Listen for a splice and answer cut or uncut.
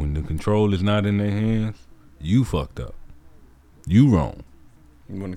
uncut